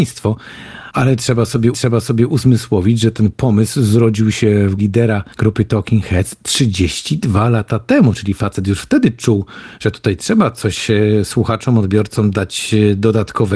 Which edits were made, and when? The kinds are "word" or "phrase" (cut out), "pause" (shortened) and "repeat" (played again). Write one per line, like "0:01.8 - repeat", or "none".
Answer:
0:01.7 - repeat
0:04.8 - word
0:05.3 - pause